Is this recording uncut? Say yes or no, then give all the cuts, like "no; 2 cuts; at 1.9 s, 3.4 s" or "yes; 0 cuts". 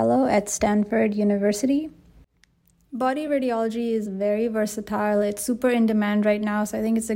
yes; 0 cuts